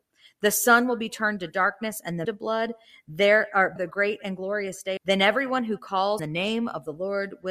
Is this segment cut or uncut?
cut